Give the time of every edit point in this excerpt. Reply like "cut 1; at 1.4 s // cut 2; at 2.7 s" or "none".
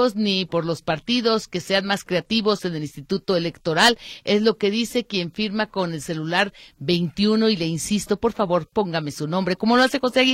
none